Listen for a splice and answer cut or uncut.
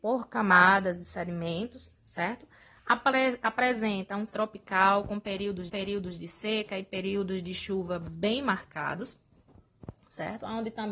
cut